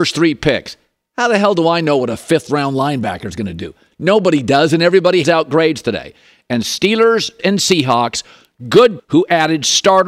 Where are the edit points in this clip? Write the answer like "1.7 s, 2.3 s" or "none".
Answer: 5.2 s, 7.4 s, 9.0 s